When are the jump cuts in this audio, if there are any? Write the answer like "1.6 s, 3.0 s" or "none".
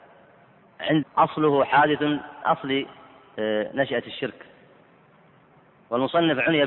1.0 s, 2.4 s